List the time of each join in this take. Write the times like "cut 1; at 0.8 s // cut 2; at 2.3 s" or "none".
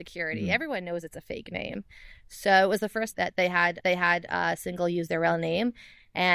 cut 1; at 3.1 s // cut 2; at 3.8 s

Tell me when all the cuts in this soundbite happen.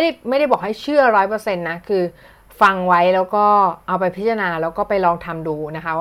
none

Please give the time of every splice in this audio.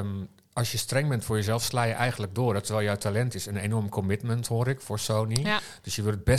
none

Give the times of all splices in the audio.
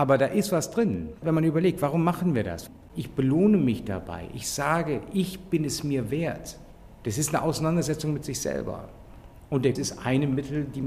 cut 1; at 1.2 s // cut 2; at 9.8 s

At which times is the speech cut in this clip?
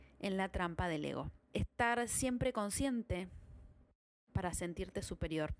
cut 1; at 1.4 s

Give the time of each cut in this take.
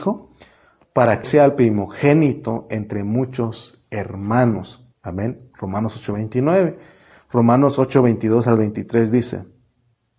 cut 1; at 1.2 s // cut 2; at 4.9 s

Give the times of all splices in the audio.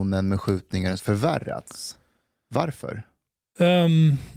cut 1; at 1.0 s

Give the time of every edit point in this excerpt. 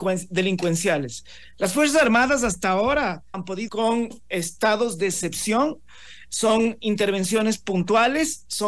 cut 1; at 3.3 s // cut 2; at 3.7 s

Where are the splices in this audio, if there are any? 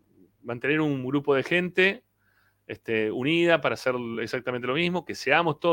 none

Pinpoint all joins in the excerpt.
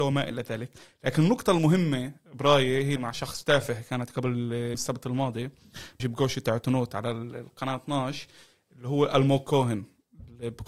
cut 1; at 3.0 s // cut 2; at 4.7 s // cut 3; at 6.0 s

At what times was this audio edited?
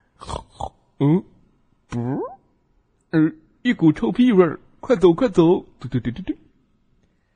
none

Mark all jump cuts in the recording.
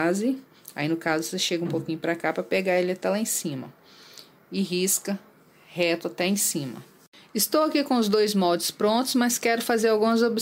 none

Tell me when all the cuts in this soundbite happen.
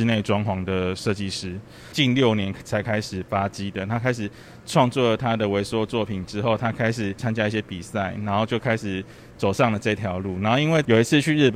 none

